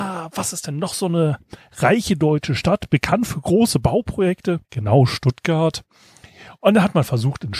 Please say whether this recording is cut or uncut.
cut